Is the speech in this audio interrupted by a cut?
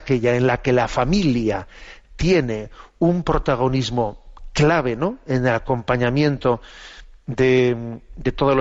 no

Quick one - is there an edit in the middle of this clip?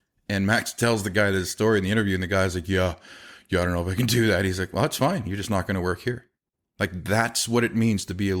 no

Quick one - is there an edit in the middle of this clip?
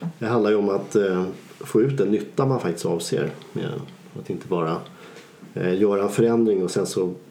no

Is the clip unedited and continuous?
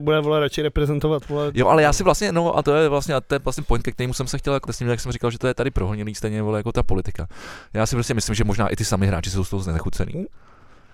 no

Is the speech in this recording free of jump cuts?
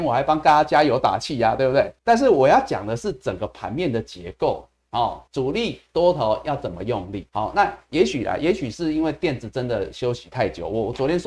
no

